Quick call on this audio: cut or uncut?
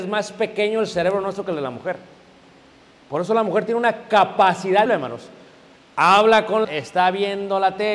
cut